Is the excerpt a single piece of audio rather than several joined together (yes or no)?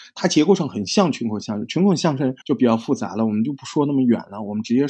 no